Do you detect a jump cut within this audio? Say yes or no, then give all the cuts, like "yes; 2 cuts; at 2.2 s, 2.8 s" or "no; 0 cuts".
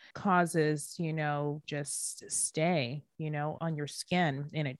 yes; 2 cuts; at 1.6 s, 3.6 s